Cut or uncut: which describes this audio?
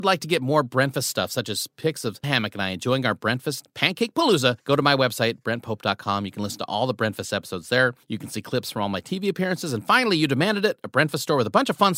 cut